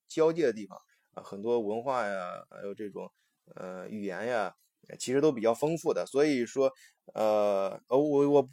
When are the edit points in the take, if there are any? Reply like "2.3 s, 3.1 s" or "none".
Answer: none